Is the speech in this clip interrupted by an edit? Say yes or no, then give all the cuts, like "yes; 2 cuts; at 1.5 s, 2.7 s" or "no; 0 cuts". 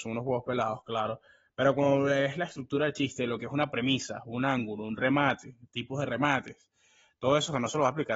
no; 0 cuts